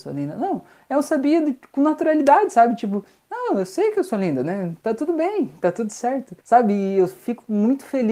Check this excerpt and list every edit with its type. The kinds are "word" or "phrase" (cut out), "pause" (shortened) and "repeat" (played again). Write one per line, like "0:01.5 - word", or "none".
0:06.4 - pause